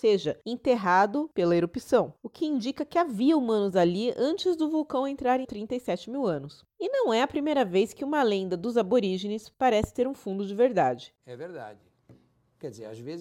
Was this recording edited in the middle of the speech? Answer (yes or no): yes